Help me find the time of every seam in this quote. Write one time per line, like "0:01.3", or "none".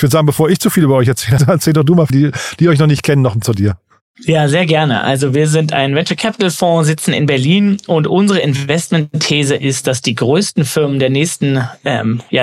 0:01.4
0:02.1
0:03.4